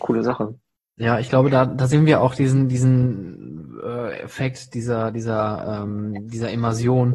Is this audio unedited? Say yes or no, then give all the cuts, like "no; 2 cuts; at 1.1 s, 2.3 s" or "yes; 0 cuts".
yes; 0 cuts